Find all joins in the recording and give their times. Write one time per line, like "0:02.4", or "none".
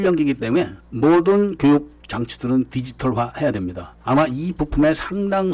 none